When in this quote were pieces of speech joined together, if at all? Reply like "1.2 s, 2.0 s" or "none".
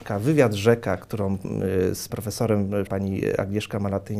2.1 s, 2.9 s